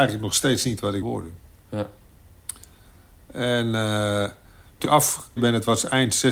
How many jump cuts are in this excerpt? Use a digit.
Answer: 3